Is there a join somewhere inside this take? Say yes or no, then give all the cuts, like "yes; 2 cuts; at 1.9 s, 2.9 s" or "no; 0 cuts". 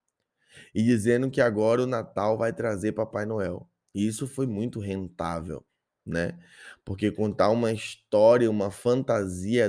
no; 0 cuts